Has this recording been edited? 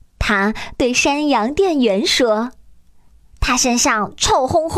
no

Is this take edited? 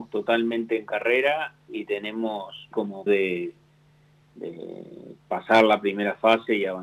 yes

